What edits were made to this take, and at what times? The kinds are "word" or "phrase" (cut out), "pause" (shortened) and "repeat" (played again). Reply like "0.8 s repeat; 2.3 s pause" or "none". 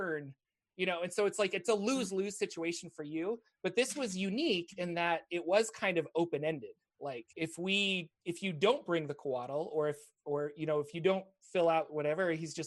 7.3 s pause; 8.2 s pause